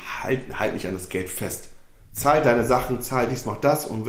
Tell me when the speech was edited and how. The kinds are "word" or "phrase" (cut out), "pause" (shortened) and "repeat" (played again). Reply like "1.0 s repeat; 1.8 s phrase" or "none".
none